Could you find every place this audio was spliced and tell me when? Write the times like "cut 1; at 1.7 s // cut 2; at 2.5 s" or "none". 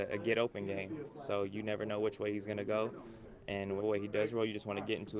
cut 1; at 3.8 s